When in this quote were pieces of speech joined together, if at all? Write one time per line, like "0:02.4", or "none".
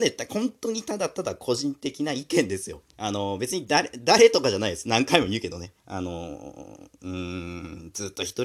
0:02.9
0:05.8

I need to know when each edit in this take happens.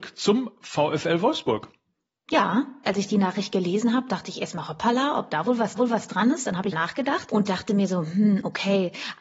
0:05.8
0:06.7

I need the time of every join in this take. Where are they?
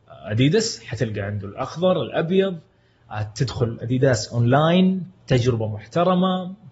none

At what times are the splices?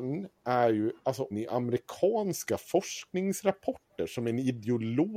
0:01.3

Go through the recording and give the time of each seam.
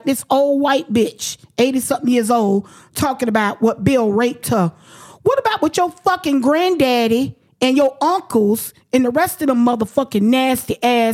none

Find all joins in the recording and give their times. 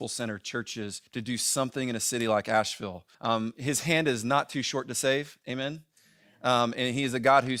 0:01.1
0:03.1

